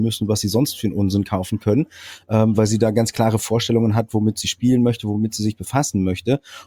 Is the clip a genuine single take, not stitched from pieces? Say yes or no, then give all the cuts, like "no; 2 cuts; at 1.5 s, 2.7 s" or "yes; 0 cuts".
yes; 0 cuts